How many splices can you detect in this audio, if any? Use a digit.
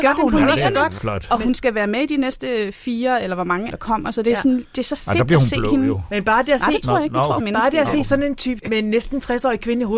4